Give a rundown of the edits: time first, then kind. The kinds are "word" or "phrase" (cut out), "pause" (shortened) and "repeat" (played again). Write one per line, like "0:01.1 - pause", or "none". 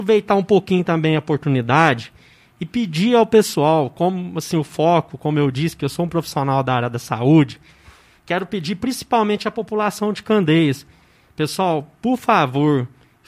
none

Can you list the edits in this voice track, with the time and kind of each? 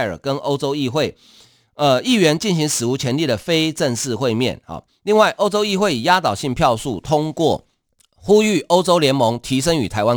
none

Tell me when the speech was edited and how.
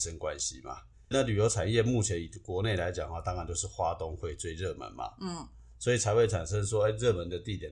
0:01.1 - word

